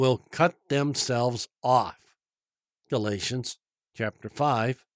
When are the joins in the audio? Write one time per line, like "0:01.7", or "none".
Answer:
none